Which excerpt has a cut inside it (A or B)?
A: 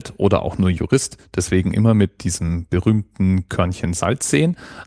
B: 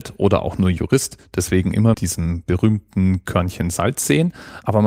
B